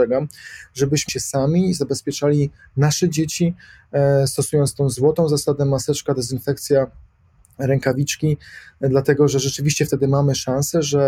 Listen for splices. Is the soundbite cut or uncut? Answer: cut